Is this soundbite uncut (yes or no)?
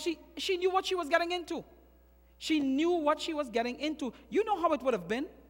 yes